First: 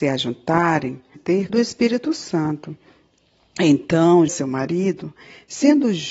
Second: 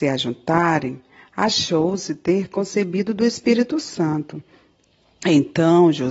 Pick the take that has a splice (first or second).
first